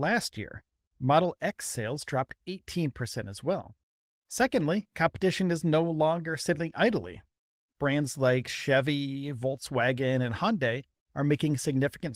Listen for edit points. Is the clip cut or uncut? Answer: uncut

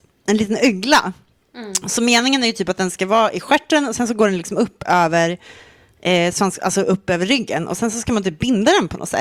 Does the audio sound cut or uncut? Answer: uncut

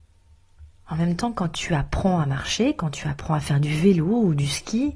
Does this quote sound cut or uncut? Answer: uncut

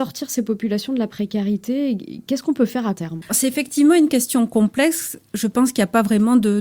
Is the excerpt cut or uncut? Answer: cut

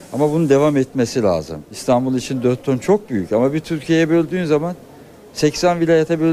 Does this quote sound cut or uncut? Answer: uncut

